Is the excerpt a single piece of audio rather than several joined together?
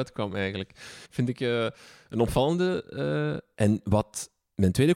no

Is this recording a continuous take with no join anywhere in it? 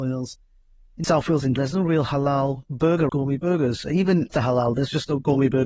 no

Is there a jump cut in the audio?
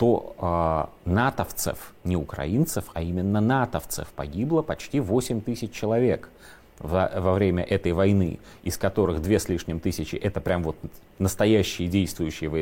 no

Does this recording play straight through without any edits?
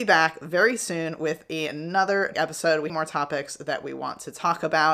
no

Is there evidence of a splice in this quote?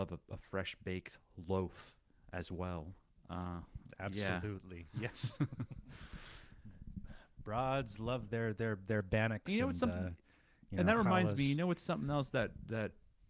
yes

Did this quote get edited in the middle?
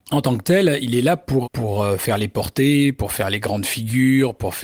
yes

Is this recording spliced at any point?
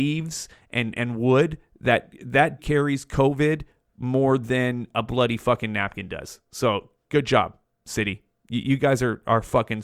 yes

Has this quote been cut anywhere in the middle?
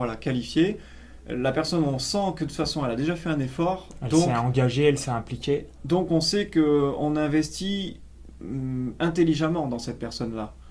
no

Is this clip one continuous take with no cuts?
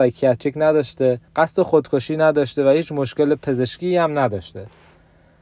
no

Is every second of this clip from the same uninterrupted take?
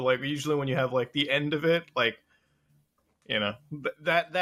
yes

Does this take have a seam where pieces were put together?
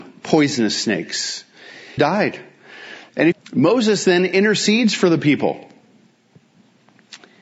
yes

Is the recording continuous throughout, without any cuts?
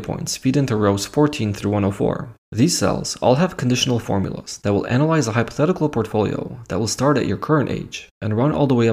no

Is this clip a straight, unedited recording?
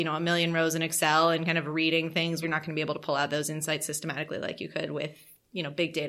no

